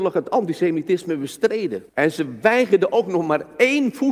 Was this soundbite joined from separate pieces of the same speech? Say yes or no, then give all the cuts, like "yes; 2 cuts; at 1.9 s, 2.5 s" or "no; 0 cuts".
yes; 1 cut; at 1.9 s